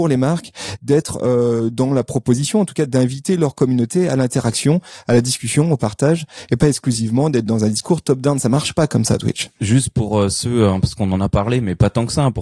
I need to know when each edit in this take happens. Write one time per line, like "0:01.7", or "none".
none